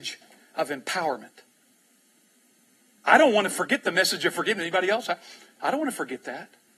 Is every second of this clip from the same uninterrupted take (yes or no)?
yes